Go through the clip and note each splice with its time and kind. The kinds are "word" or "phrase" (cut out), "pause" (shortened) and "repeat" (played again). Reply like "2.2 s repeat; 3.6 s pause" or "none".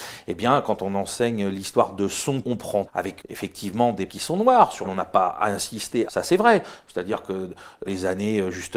2.4 s word; 2.9 s word; 3.2 s word; 4.1 s word; 4.8 s word; 6.1 s word; 7.9 s word

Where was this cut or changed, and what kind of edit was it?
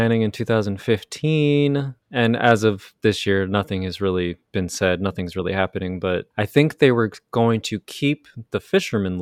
2.0 s pause; 4.5 s pause; 6.3 s pause

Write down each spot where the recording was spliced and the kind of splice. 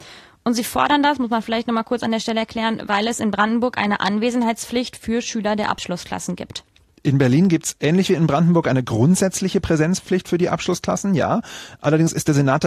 none

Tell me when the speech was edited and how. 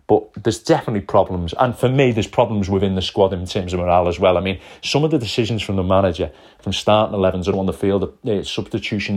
7.5 s word

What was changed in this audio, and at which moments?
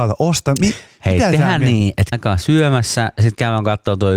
2.1 s word

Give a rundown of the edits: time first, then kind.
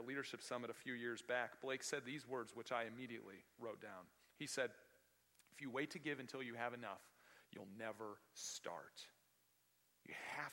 none

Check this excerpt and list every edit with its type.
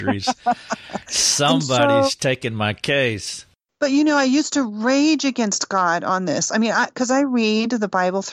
none

